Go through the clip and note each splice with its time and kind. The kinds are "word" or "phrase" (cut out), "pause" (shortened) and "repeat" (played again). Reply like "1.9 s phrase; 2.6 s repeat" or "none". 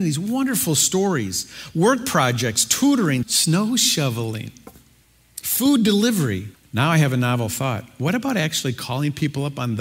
3.2 s word; 5.0 s pause; 6.5 s pause